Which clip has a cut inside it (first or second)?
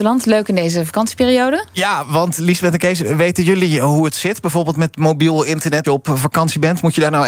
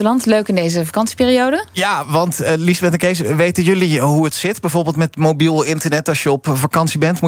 first